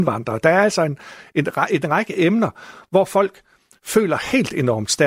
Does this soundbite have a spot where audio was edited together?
no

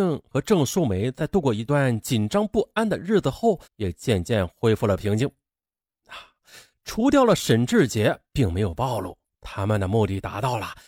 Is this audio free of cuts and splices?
no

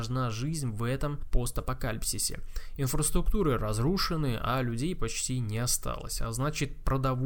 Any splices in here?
no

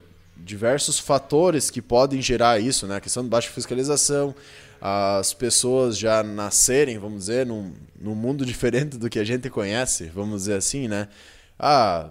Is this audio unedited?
yes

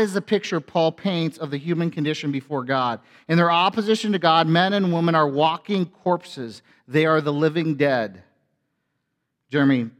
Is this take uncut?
yes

